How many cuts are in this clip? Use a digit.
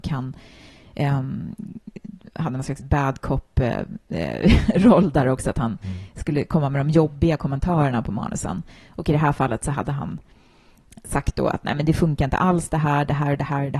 0